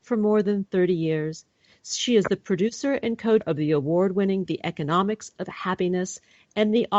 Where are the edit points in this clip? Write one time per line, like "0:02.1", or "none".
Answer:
0:03.4
0:04.4